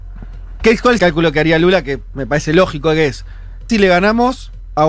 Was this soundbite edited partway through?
yes; 2 cuts; at 1.0 s, 3.7 s

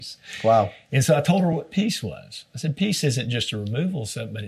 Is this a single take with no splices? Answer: yes; 0 cuts

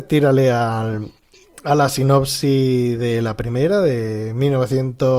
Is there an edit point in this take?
no; 0 cuts

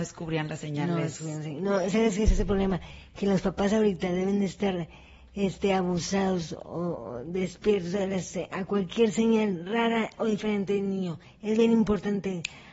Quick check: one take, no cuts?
yes; 0 cuts

